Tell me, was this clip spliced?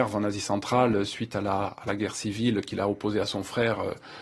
no; 0 cuts

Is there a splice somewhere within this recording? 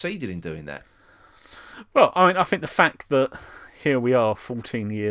no; 0 cuts

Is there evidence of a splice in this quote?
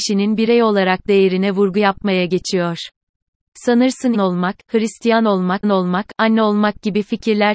yes; 2 cuts; at 4.1 s, 5.6 s

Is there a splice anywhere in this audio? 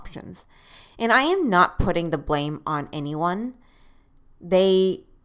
no; 0 cuts

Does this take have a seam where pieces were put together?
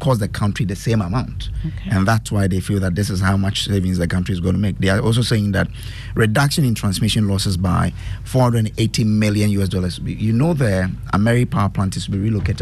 no; 0 cuts

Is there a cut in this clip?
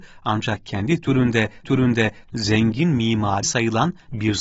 yes; 2 cuts; at 1.6 s, 3.4 s

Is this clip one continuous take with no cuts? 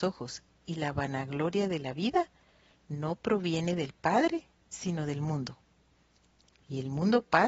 yes; 0 cuts

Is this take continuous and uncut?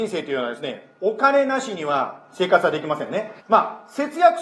no; 1 cut; at 3.4 s

